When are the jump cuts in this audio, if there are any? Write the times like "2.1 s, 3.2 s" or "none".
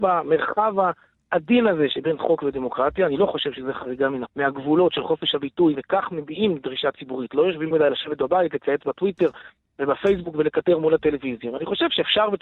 4.3 s, 5.7 s, 7.7 s